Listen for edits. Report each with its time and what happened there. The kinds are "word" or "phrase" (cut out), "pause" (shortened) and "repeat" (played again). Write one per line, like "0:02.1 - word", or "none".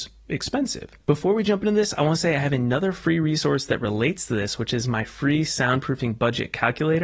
0:01.0 - pause